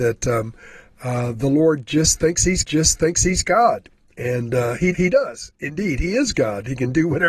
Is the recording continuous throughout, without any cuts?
no; 2 cuts; at 2.6 s, 4.9 s

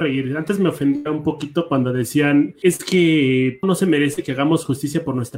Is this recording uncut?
no; 2 cuts; at 2.6 s, 3.6 s

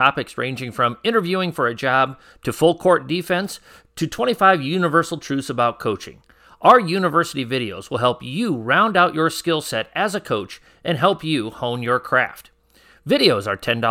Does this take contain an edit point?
no; 0 cuts

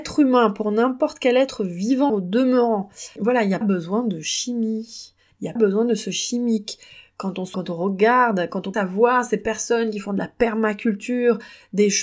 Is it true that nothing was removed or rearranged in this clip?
no; 6 cuts; at 2.1 s, 3.2 s, 3.6 s, 5.6 s, 7.5 s, 8.7 s

